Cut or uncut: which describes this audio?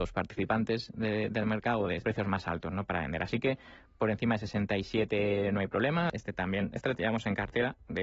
cut